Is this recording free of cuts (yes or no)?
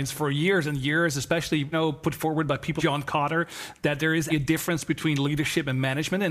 no